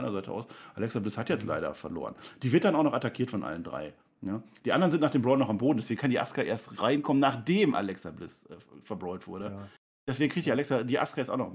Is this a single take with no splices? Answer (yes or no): yes